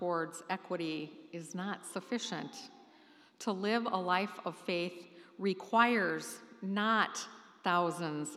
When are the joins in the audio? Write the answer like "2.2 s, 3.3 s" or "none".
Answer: none